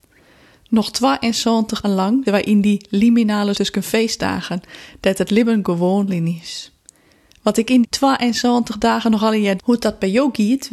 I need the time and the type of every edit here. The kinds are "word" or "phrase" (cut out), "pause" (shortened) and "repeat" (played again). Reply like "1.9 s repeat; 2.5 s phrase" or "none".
1.8 s word; 2.3 s word; 3.5 s word; 6.1 s word; 7.8 s word; 9.6 s word